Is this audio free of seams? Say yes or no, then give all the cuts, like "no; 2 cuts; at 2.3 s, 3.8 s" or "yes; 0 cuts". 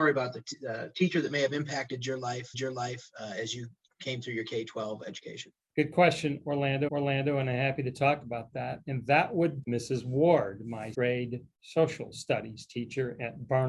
no; 7 cuts; at 2.5 s, 3.9 s, 5.7 s, 6.9 s, 9.6 s, 10.9 s, 11.5 s